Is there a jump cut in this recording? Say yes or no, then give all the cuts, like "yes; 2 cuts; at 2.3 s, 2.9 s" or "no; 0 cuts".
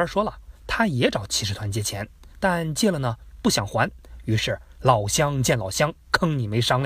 yes; 1 cut; at 2.3 s